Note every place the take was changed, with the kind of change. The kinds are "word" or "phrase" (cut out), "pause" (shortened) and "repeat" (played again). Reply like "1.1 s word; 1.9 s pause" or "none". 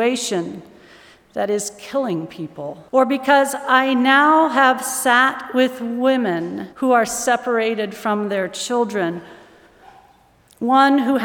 2.9 s pause; 6.7 s pause

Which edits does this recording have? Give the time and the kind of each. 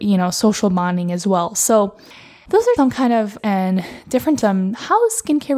2.8 s word; 3.4 s word; 4.4 s word

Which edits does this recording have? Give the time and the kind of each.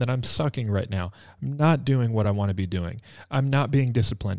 none

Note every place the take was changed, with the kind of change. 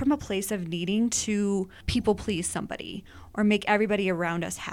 none

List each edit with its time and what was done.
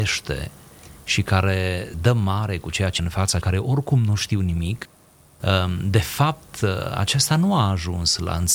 1.9 s word; 3.0 s word; 3.4 s word

